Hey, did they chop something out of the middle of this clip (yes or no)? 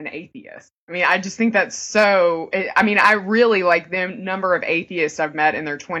no